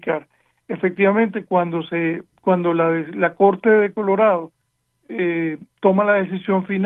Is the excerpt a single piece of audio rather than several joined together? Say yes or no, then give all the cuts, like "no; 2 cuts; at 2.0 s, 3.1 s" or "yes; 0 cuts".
yes; 0 cuts